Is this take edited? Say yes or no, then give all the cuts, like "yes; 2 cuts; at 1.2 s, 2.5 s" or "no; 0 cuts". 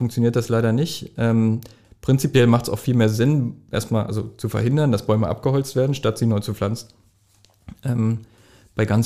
no; 0 cuts